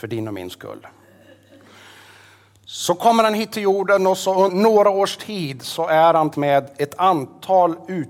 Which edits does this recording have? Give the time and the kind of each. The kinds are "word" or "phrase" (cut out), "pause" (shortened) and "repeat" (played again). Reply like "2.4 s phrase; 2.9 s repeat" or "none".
4.5 s word; 6.3 s word